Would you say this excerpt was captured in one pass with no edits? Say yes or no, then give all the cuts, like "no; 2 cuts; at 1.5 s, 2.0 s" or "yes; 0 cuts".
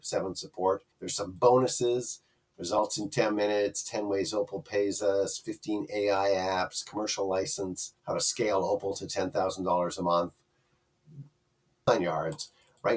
no; 3 cuts; at 0.9 s, 8.0 s, 11.9 s